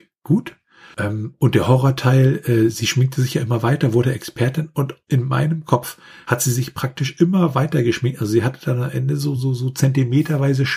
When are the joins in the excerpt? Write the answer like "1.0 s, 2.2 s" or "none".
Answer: none